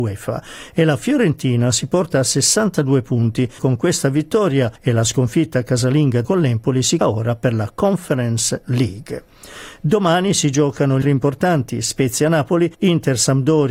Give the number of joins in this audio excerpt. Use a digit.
6